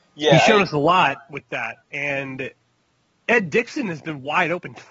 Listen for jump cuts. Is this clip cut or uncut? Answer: cut